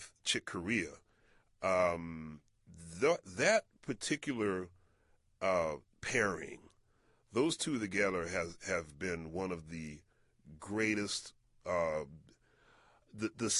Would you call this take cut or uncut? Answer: uncut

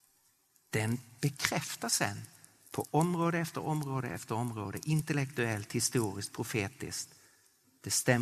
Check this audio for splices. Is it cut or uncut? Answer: uncut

